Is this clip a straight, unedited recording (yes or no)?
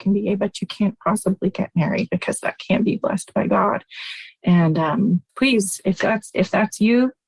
no